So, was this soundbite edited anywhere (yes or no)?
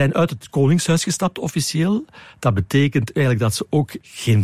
no